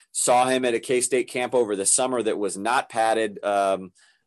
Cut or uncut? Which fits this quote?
uncut